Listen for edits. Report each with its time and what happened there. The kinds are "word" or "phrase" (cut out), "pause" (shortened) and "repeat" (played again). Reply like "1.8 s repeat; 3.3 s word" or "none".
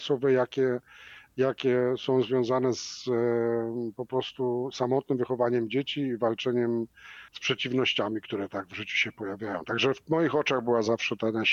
7.3 s pause